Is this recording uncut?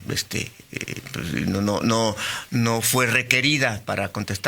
yes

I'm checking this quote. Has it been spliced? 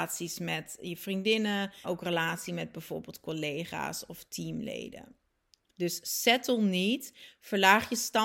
yes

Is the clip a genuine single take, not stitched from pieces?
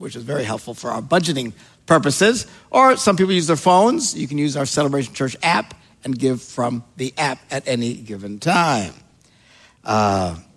yes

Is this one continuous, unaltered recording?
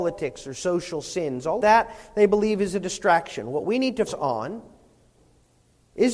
no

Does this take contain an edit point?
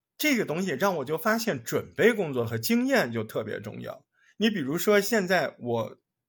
no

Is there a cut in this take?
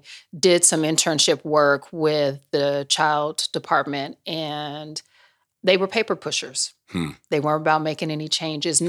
no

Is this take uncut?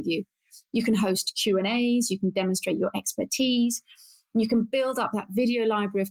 yes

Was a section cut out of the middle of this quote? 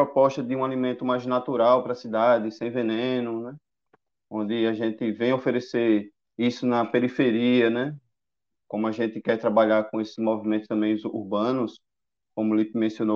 no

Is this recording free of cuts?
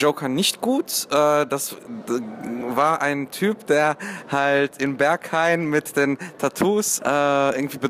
no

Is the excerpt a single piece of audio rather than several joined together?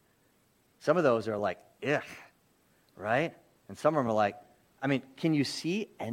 yes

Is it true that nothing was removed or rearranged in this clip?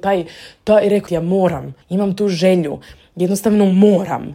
no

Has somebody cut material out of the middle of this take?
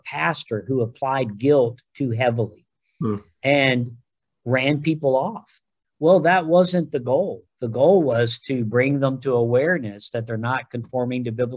no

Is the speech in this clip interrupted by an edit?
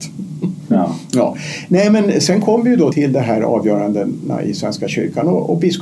yes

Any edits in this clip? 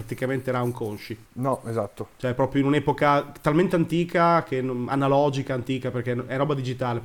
yes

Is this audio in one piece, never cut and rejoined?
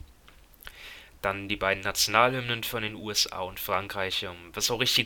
yes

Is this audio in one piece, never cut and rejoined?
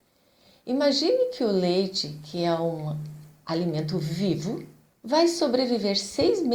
no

